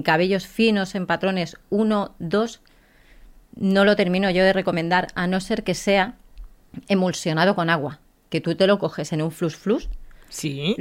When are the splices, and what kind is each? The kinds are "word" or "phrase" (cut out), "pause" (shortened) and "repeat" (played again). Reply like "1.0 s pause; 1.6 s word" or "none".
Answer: 8.1 s pause